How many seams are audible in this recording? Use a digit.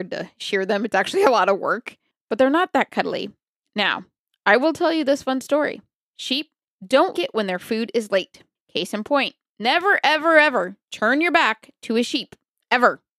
1